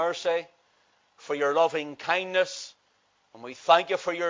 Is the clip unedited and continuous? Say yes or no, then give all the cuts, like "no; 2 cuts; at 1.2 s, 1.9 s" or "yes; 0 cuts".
yes; 0 cuts